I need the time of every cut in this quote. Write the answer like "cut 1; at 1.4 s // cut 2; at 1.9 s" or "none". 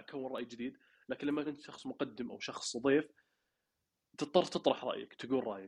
cut 1; at 1.4 s